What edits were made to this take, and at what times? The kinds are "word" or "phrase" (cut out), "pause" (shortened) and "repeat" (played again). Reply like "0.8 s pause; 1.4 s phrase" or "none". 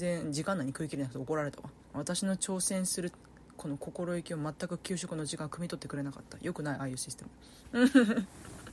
1.8 s pause